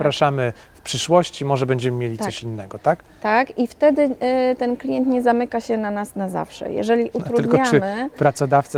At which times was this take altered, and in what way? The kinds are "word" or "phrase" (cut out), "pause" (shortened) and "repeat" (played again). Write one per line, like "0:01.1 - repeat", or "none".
none

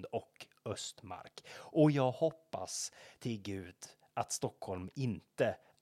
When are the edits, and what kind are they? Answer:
none

